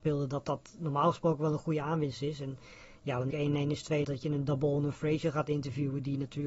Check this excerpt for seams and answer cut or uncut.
cut